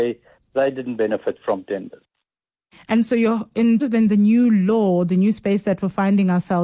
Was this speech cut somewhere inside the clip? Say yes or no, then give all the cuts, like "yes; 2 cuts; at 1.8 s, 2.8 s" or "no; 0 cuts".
yes; 1 cut; at 3.8 s